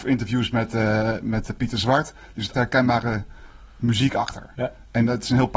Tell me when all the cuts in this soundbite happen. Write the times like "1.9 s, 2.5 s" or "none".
2.5 s, 4.5 s